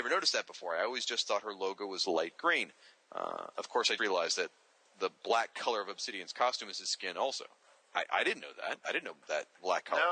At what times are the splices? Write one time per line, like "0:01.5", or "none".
0:04.0